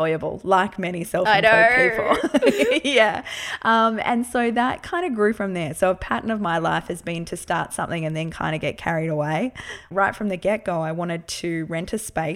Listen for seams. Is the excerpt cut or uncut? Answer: uncut